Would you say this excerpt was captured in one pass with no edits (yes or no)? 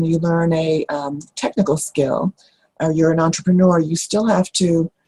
no